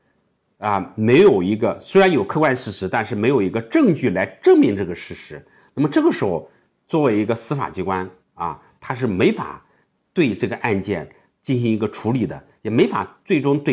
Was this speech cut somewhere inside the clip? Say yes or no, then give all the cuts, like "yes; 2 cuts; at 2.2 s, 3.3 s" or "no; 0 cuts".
no; 0 cuts